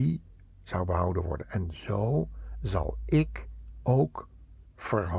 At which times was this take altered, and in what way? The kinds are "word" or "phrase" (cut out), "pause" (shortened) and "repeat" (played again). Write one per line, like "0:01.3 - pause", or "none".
none

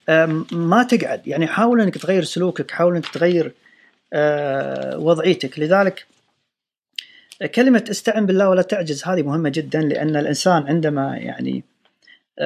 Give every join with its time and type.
none

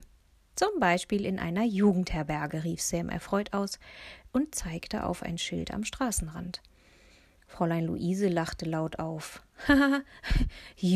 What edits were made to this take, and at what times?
none

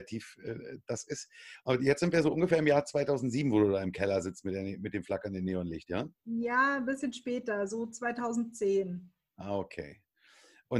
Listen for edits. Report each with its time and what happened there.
0:06.1 - pause

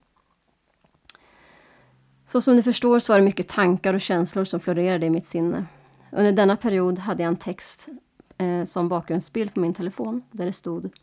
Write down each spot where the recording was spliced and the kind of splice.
none

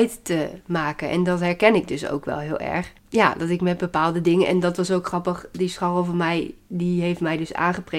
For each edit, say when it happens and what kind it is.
0:03.0 - pause

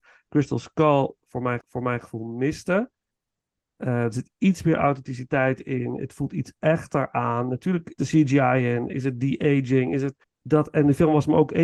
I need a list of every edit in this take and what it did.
0:01.6 - repeat
0:08.0 - phrase
0:10.2 - pause

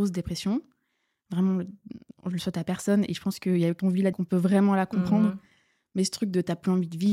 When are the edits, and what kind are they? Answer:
0:03.8 - word
0:04.1 - word

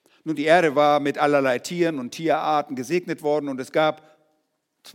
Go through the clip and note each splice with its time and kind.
none

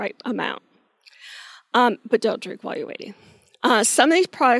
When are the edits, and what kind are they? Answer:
none

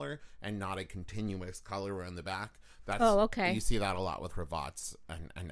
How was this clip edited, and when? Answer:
0:04.3 - word

